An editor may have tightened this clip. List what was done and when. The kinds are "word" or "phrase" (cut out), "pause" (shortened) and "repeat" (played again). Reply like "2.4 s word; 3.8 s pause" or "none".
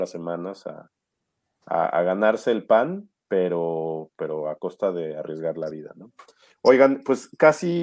none